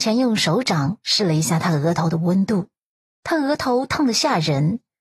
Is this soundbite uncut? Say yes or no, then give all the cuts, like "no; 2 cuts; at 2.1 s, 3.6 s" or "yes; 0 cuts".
yes; 0 cuts